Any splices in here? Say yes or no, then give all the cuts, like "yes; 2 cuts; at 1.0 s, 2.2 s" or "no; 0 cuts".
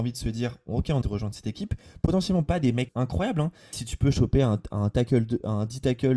yes; 3 cuts; at 1.0 s, 2.9 s, 3.7 s